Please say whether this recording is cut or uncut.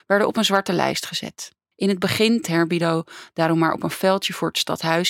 cut